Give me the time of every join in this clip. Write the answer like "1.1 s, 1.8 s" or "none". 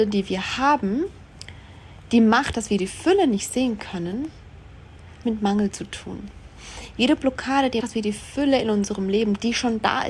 5.2 s, 7.8 s